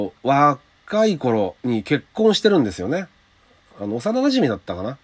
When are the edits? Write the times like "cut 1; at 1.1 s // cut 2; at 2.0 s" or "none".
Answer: cut 1; at 1.6 s

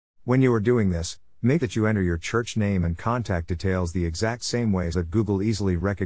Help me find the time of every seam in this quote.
cut 1; at 1.6 s // cut 2; at 4.9 s

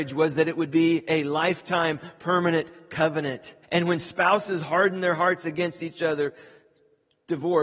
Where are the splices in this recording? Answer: cut 1; at 3.6 s

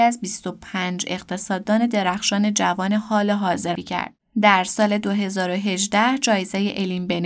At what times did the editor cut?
cut 1; at 3.8 s

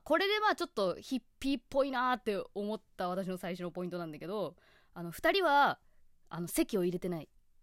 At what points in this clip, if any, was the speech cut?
none

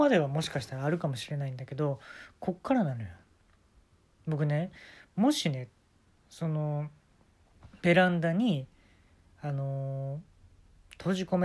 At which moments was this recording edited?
none

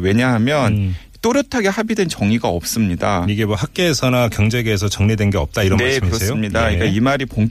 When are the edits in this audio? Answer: none

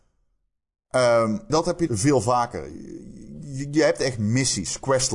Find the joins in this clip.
cut 1; at 1.5 s // cut 2; at 1.9 s

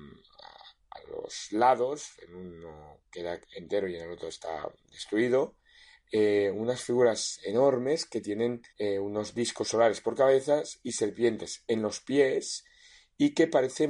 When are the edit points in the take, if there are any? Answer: cut 1; at 8.7 s

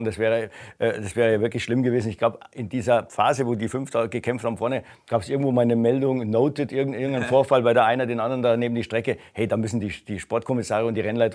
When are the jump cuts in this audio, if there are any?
none

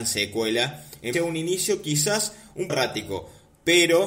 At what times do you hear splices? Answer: cut 1; at 1.1 s // cut 2; at 2.7 s

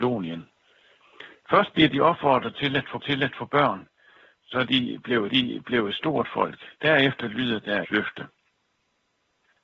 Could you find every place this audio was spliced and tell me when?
cut 1; at 3.0 s // cut 2; at 5.3 s // cut 3; at 6.7 s // cut 4; at 7.8 s

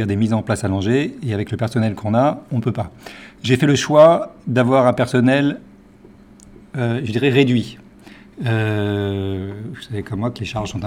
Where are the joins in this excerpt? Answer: none

